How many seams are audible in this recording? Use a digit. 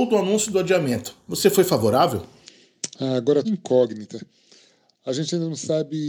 2